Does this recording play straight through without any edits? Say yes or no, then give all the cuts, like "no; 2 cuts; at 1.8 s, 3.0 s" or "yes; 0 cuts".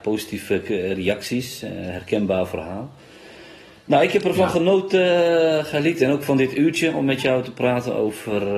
yes; 0 cuts